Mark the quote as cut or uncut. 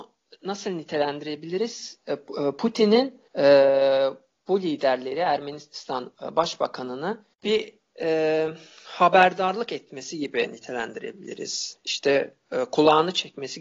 cut